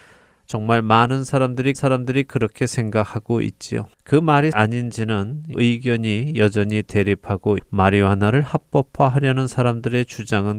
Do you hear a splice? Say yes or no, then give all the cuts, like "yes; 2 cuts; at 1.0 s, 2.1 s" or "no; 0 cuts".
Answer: yes; 5 cuts; at 1.7 s, 3.9 s, 4.5 s, 5.5 s, 7.6 s